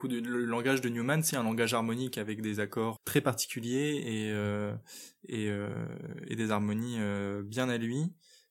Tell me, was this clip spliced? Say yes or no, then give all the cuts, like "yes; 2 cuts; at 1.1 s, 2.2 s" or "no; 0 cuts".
yes; 2 cuts; at 1.3 s, 3.0 s